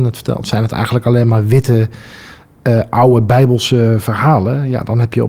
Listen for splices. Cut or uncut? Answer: uncut